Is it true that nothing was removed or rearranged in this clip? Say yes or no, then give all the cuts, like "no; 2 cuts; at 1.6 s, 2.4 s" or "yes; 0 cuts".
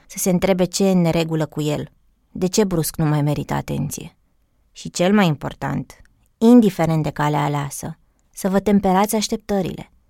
yes; 0 cuts